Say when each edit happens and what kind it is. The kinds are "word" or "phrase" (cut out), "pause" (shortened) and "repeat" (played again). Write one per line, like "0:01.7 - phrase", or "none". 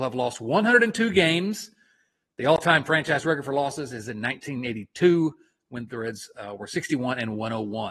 none